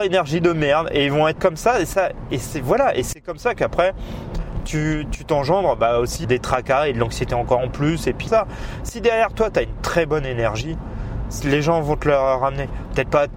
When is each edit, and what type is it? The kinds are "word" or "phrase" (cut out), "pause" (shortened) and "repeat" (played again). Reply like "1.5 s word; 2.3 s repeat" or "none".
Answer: 1.4 s word; 6.2 s word; 8.3 s word